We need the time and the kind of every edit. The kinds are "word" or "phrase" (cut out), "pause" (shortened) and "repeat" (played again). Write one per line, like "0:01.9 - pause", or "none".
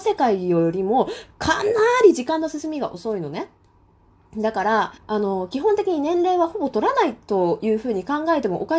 0:05.0 - pause